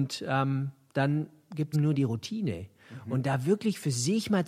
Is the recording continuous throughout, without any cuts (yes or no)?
no